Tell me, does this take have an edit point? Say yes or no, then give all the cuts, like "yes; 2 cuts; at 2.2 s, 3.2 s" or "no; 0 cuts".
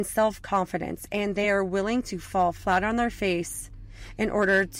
no; 0 cuts